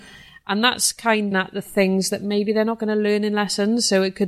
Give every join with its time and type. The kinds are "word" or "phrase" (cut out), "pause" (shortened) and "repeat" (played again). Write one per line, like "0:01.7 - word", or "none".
0:01.3 - phrase